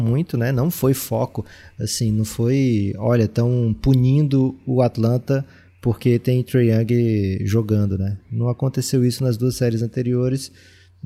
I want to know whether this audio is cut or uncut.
uncut